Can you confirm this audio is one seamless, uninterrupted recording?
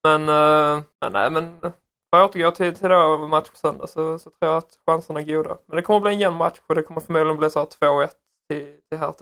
no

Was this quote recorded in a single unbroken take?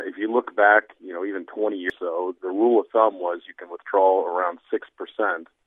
no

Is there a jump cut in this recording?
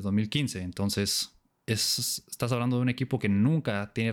no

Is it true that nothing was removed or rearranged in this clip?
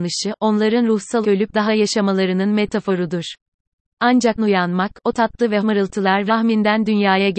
no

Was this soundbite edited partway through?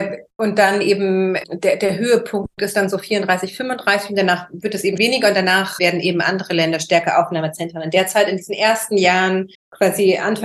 yes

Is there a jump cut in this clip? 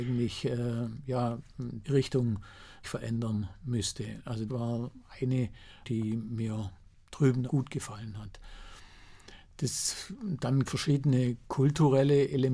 yes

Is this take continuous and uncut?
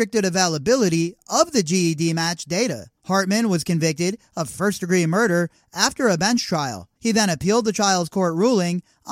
no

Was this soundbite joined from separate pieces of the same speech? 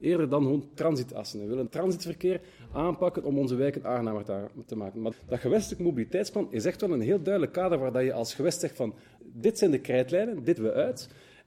yes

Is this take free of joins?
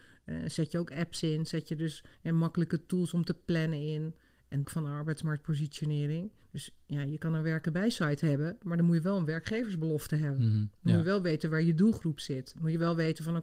no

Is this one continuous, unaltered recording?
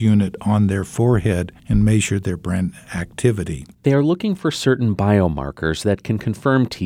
no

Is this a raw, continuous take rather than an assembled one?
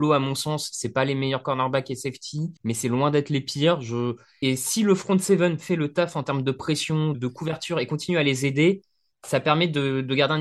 no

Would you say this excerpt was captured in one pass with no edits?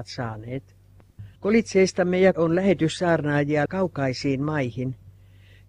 no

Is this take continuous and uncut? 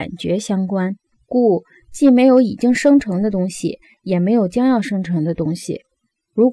no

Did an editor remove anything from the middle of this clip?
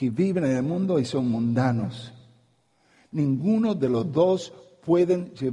no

